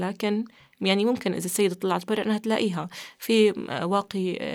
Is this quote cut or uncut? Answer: uncut